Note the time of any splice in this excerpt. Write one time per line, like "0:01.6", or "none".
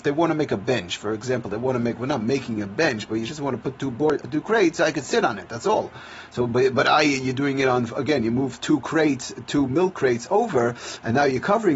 0:04.2

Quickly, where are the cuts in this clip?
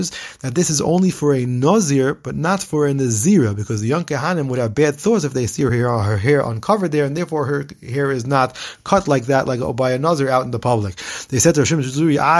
none

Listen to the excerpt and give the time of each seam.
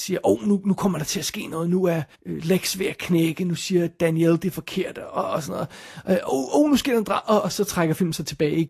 0:02.1

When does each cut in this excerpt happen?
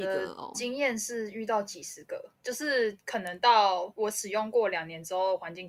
0:02.4

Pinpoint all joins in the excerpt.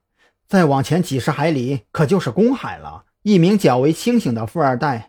0:03.1

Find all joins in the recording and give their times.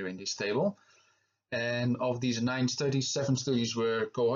none

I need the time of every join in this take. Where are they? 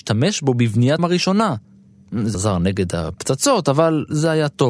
0:01.0
0:02.3

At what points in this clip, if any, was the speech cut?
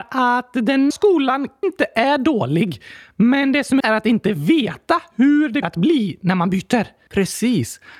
0:00.9
0:01.6
0:03.8
0:05.6
0:07.1

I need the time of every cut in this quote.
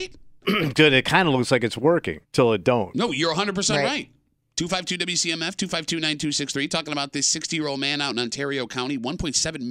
0:02.2

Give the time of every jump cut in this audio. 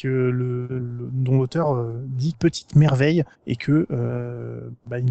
0:02.3
0:03.3

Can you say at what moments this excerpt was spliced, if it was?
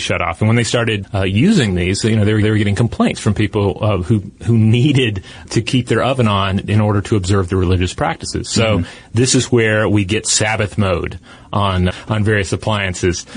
0:01.0
0:02.4
0:04.3
0:05.4
0:11.9

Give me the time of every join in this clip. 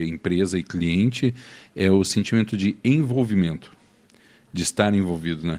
none

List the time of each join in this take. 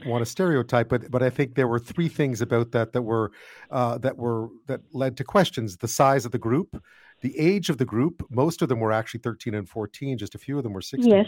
none

